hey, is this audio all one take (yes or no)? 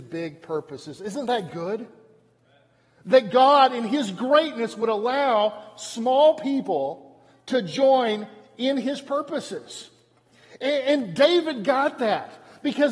yes